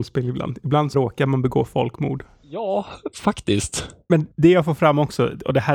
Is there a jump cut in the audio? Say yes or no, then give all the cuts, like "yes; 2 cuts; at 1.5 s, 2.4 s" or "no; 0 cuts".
yes; 1 cut; at 0.9 s